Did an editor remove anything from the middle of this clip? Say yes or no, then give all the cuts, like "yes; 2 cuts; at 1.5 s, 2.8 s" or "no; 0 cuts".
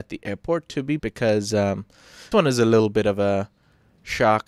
yes; 2 cuts; at 1.0 s, 2.3 s